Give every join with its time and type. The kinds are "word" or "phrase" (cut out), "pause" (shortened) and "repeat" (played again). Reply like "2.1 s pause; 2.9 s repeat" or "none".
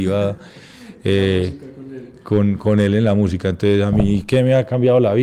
none